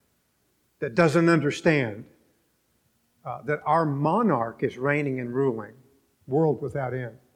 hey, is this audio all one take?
yes; 0 cuts

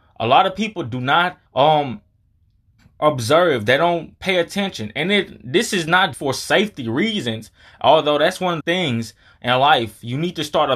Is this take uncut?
no; 3 cuts; at 1.5 s, 6.1 s, 8.6 s

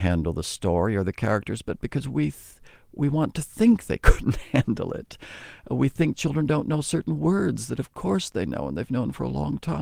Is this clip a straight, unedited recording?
yes; 0 cuts

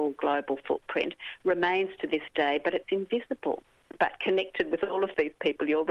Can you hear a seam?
no; 0 cuts

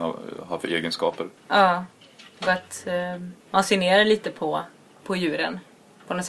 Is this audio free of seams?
no; 2 cuts; at 1.4 s, 3.4 s

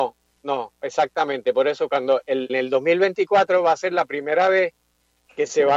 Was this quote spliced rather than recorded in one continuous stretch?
yes; 1 cut; at 2.5 s

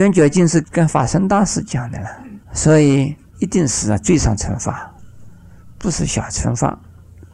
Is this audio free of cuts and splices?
no; 1 cut; at 2.4 s

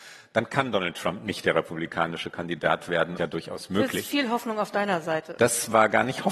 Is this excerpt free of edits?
no; 1 cut; at 3.2 s

